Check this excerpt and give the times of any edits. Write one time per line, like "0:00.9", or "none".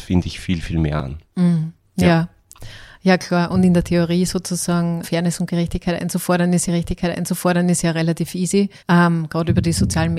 0:05.0
0:06.7
0:08.8